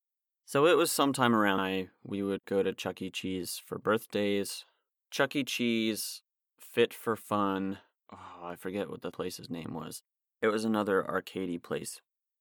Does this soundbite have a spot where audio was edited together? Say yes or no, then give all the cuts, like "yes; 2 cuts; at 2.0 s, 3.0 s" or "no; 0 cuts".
yes; 3 cuts; at 1.6 s, 8.0 s, 9.1 s